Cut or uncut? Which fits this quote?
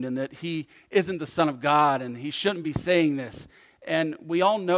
uncut